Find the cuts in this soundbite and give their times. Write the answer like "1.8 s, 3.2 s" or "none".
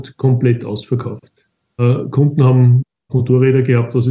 2.8 s